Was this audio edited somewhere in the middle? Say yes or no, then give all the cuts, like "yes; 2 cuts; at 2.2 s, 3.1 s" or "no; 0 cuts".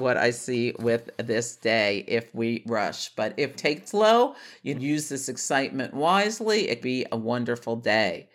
yes; 4 cuts; at 3.5 s, 3.9 s, 4.7 s, 6.8 s